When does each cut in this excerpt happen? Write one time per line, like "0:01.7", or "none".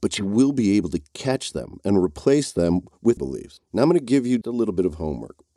0:03.2
0:04.4